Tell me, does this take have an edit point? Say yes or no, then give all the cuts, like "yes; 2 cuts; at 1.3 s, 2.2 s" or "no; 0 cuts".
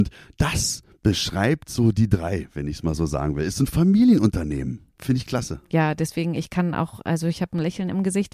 no; 0 cuts